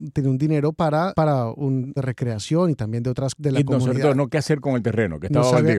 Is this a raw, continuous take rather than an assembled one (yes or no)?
no